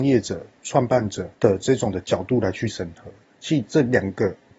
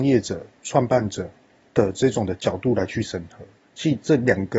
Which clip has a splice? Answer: first; 1 cut; at 1.3 s

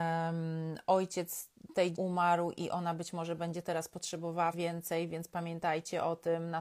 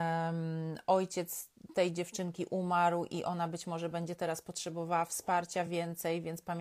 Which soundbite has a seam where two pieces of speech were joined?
first; 2 cuts; at 1.9 s, 4.5 s

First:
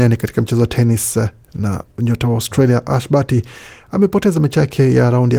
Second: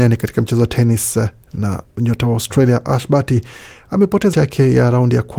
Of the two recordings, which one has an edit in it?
second; 1 cut; at 4.3 s

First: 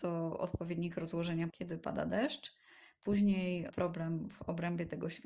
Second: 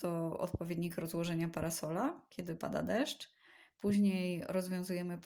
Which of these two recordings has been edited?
first; 2 cuts; at 1.5 s, 3.7 s

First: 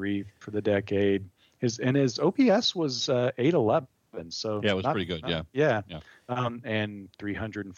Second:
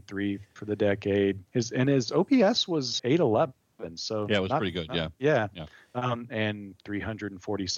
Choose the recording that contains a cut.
second; 2 cuts; at 1.5 s, 3.0 s

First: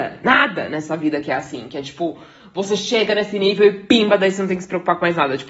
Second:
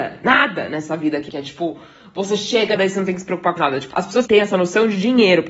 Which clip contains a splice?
second; 5 cuts; at 1.3 s, 2.8 s, 3.6 s, 3.9 s, 4.3 s

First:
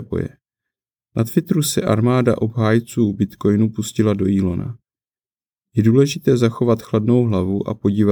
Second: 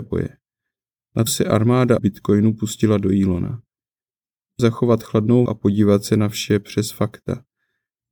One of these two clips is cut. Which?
second; 4 cuts; at 1.3 s, 2.0 s, 4.6 s, 5.5 s

